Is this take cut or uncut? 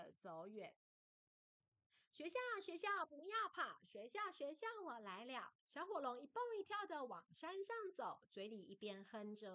cut